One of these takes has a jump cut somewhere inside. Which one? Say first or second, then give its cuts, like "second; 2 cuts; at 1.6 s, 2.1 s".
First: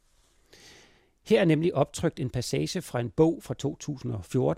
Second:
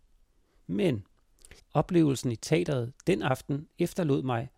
second; 1 cut; at 1.6 s